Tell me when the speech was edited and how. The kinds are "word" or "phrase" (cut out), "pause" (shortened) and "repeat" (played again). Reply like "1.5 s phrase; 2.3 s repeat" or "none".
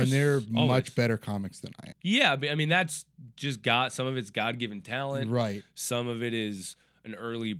1.9 s word

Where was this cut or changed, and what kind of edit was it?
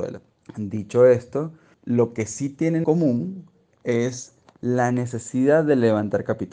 2.8 s word

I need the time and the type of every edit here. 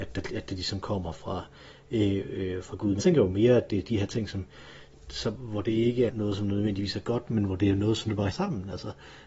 3.0 s word; 5.4 s word; 6.1 s word; 8.3 s word

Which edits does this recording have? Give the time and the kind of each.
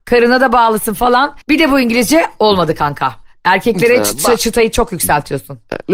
1.4 s pause

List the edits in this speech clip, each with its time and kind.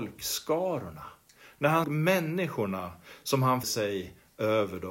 1.8 s word; 3.6 s word

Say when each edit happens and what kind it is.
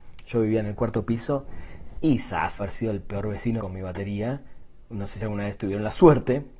2.6 s word; 3.6 s phrase

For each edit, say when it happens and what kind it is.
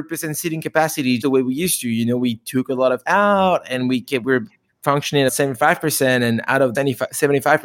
1.2 s word; 3.0 s word; 5.3 s word; 6.7 s word

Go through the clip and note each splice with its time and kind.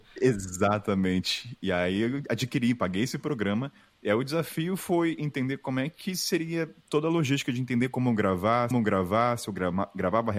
8.7 s repeat

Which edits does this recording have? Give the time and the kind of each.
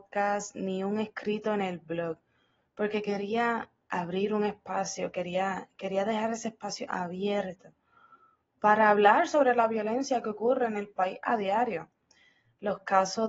none

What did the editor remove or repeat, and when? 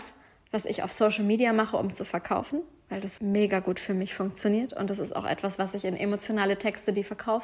3.2 s word

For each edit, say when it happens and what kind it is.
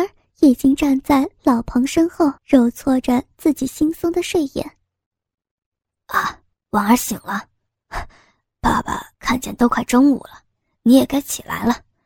2.4 s pause; 6.5 s pause; 9.1 s pause

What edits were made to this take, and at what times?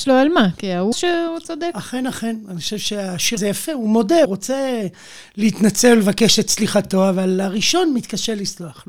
0.9 s word; 3.4 s word; 4.2 s word

